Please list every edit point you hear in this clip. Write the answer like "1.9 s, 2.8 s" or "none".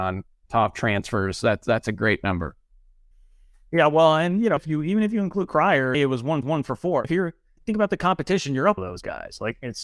3.1 s, 4.6 s, 5.9 s, 6.4 s, 7.0 s, 7.6 s, 8.8 s